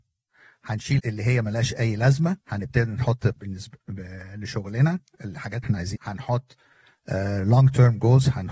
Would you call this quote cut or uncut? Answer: cut